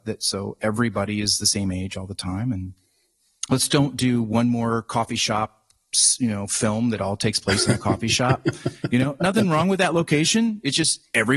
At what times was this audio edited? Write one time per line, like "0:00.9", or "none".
none

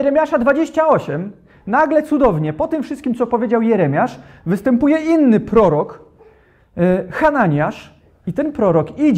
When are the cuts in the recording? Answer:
none

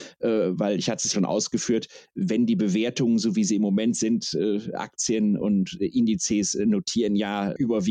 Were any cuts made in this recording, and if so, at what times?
0:01.1
0:05.4

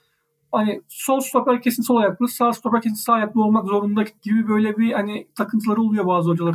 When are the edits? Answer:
0:04.2

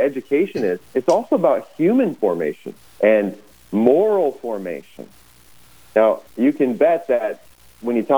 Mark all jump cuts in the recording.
0:02.8
0:06.3

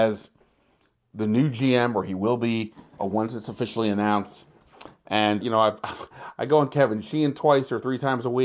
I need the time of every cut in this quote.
0:05.4

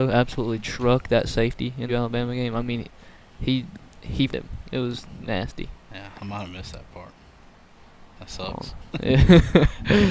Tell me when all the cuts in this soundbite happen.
0:01.9
0:04.3

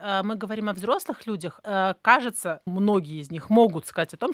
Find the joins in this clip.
0:01.6
0:02.7

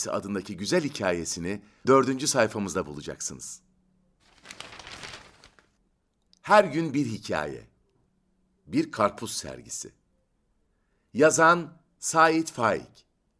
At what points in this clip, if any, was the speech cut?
0:01.8

